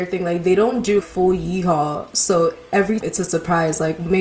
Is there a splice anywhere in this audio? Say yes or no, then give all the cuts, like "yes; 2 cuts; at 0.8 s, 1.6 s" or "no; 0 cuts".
yes; 2 cuts; at 1.0 s, 3.0 s